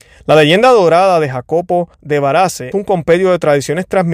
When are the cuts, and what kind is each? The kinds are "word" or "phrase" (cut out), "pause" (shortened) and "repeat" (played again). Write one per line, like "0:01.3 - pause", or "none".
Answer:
0:01.9 - pause
0:02.7 - word